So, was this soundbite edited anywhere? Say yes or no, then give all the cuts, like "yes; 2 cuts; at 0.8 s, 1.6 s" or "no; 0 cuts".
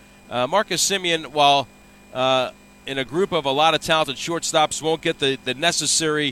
no; 0 cuts